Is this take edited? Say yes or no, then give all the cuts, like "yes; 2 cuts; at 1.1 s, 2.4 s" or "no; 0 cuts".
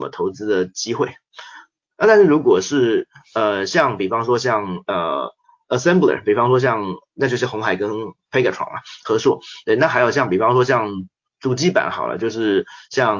no; 0 cuts